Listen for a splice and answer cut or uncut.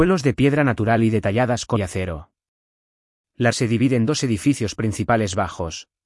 cut